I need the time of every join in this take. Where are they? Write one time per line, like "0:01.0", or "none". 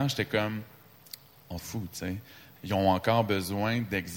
0:01.6
0:02.6